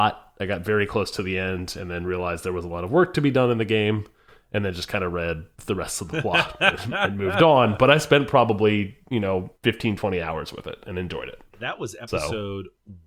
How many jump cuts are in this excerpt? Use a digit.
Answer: 2